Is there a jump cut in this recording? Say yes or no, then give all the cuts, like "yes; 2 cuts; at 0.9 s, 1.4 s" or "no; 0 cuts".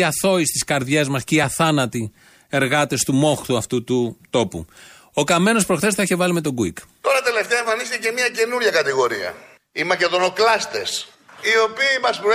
no; 0 cuts